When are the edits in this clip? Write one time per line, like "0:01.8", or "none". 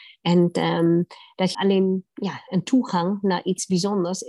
0:01.5